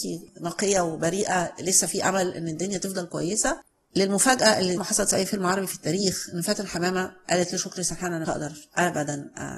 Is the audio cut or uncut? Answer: cut